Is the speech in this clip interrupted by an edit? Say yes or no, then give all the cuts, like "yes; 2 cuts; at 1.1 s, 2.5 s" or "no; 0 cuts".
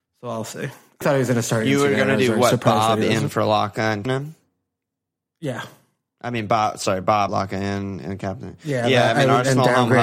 yes; 3 cuts; at 1.0 s, 4.1 s, 7.3 s